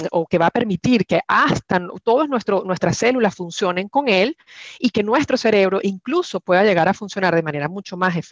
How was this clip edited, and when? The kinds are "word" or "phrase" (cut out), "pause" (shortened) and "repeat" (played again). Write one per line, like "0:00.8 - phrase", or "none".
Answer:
none